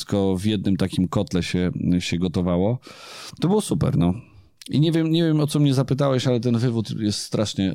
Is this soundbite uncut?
yes; 0 cuts

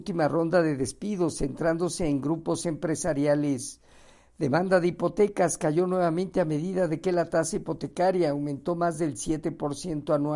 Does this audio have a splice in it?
no; 0 cuts

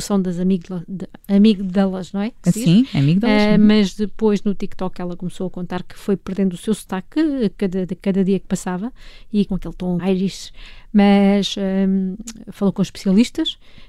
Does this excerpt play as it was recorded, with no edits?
no; 2 cuts; at 9.5 s, 10.0 s

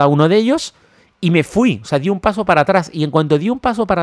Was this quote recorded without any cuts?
yes; 0 cuts

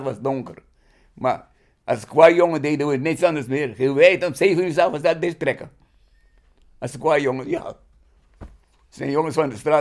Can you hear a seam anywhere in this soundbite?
no; 0 cuts

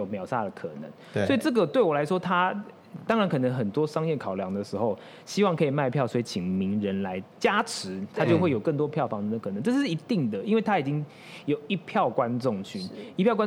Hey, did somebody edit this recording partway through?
no; 0 cuts

